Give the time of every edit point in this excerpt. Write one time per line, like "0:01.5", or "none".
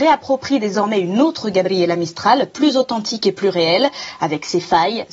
none